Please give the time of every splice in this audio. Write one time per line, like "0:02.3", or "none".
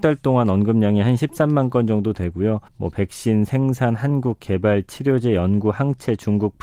0:02.7

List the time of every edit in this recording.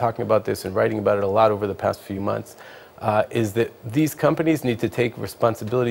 none

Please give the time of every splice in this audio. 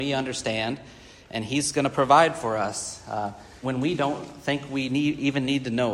0:03.6

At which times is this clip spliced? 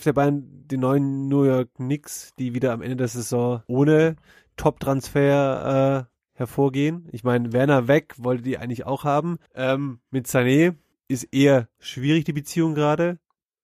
0:03.6
0:09.5
0:10.9

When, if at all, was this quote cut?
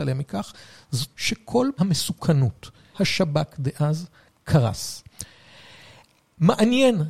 0:01.1
0:01.8
0:02.9

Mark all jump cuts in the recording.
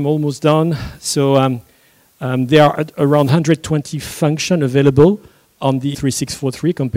0:05.9

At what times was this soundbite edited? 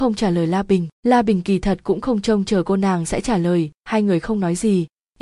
0:00.9
0:03.8

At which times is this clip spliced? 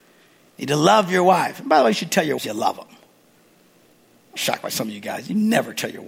0:02.4
0:04.4

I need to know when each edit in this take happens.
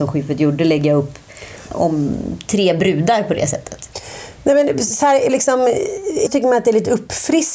0:01.7
0:04.7
0:05.3
0:06.3

